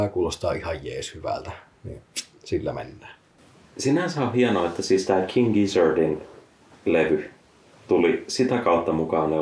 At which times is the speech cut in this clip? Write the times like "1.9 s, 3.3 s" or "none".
none